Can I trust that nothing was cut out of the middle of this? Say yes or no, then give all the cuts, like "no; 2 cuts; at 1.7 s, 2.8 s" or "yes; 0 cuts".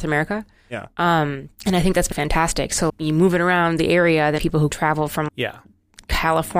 no; 6 cuts; at 1.5 s, 2.1 s, 2.9 s, 4.4 s, 4.7 s, 5.3 s